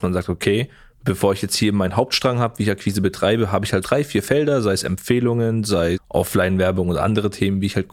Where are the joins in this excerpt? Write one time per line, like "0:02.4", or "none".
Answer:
0:03.8
0:05.9